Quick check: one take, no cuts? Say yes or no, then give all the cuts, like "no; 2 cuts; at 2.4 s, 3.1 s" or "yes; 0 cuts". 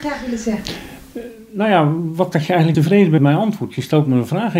no; 3 cuts; at 2.3 s, 2.7 s, 3.2 s